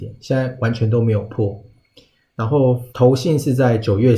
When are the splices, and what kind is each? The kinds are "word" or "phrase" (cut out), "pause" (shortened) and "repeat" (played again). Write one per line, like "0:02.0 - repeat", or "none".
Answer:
0:02.9 - pause

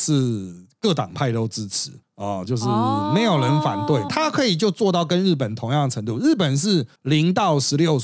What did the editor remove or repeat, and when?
0:04.1 - phrase
0:07.0 - pause

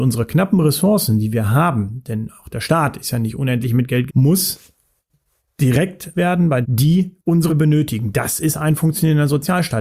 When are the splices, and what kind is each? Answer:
0:04.1 - word
0:06.1 - word
0:06.6 - word
0:07.5 - word

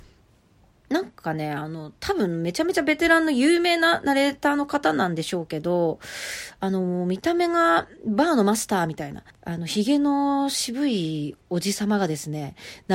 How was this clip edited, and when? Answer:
0:09.3 - pause
0:11.4 - pause

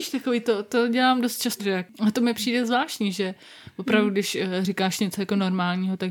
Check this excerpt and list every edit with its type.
0:01.6 - word

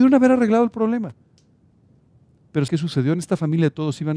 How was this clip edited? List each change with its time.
0:02.7 - word

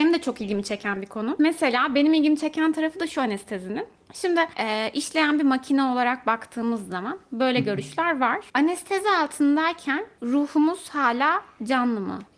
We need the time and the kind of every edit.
0:04.5 - word

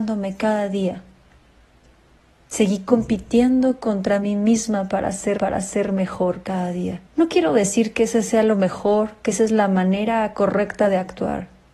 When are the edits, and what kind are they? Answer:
0:01.4 - pause
0:05.4 - repeat
0:07.1 - pause

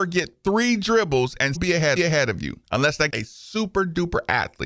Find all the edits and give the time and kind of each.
0:01.5 - word
0:02.0 - repeat
0:02.6 - pause
0:03.1 - word

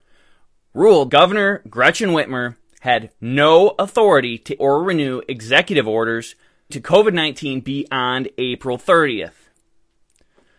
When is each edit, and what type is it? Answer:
0:01.1 - word
0:04.6 - word
0:06.7 - word

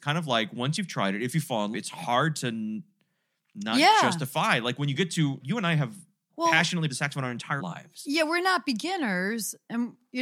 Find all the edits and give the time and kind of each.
0:01.7 - word
0:05.4 - word
0:06.3 - word
0:06.9 - word
0:07.6 - word

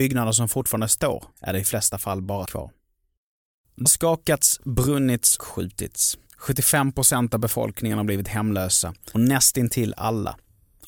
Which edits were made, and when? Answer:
0:01.3 - pause
0:02.5 - word
0:03.9 - word
0:05.4 - word
0:06.3 - pause
0:09.1 - word

